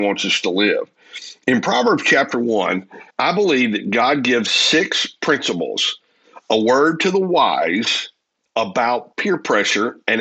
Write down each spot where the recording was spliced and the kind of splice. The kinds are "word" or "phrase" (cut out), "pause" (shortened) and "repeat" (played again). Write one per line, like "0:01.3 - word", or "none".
0:03.1 - pause
0:04.5 - word
0:08.3 - pause